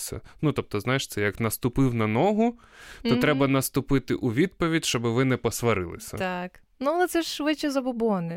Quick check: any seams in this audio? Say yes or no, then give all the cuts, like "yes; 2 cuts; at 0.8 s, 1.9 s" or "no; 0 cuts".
no; 0 cuts